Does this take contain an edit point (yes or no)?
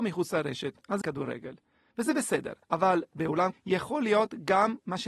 yes